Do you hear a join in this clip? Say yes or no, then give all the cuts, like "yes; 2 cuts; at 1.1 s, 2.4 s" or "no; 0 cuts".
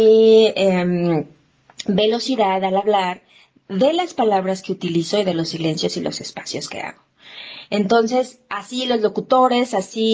no; 0 cuts